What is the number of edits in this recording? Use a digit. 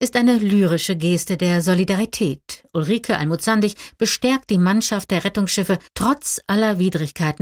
1